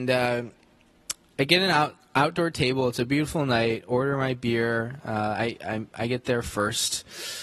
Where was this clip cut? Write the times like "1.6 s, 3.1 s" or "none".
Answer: none